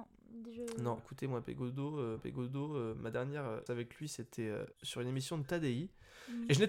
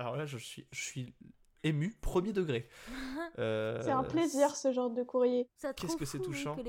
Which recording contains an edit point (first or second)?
first